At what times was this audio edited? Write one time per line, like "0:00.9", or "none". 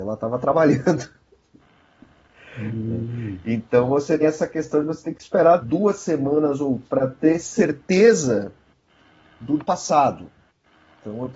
0:04.2
0:05.6
0:06.8
0:09.6